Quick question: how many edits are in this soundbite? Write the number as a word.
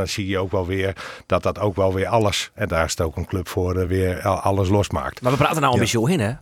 zero